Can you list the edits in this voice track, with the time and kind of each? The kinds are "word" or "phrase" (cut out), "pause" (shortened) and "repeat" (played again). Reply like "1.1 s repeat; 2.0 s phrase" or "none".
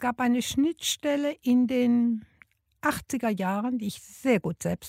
none